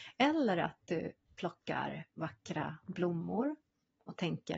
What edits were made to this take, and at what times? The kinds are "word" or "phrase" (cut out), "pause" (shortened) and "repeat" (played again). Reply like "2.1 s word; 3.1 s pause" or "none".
none